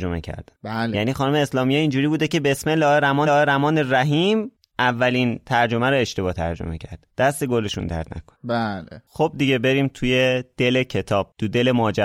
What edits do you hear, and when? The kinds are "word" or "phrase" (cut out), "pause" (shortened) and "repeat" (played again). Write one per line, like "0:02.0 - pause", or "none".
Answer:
0:03.2 - repeat